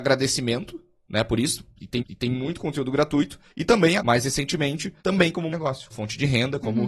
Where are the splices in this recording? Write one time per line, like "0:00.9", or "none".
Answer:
0:02.0
0:03.5
0:04.0
0:05.0
0:05.5
0:05.9